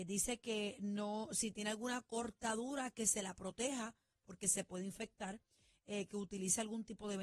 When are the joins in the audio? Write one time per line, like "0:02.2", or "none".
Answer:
none

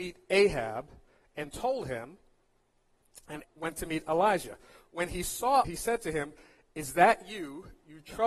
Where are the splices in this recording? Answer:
0:03.4
0:05.6

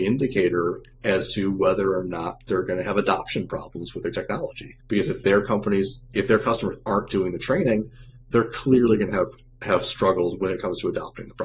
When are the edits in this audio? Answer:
0:04.8

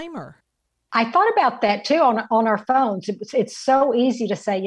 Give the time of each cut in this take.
none

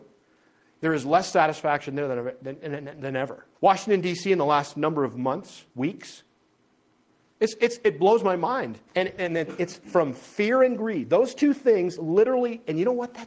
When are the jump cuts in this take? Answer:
0:03.5
0:05.7
0:08.9

